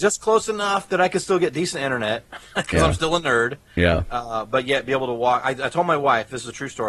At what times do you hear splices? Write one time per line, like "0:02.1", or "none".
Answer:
none